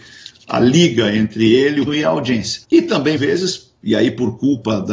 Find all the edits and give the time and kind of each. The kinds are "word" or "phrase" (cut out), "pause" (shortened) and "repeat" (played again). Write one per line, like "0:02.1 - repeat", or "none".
0:01.9 - word
0:02.6 - pause
0:03.2 - word